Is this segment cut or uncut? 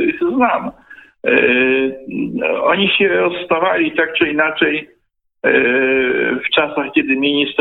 uncut